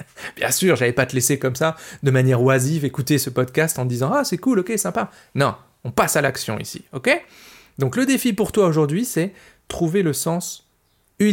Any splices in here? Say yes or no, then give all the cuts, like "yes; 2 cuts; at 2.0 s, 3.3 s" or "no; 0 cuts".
no; 0 cuts